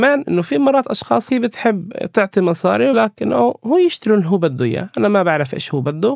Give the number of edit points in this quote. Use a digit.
2